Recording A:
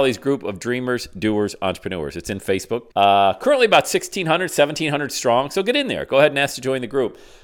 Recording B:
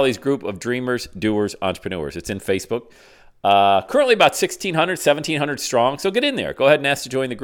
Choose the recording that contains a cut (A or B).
A